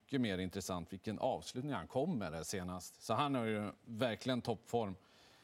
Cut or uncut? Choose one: uncut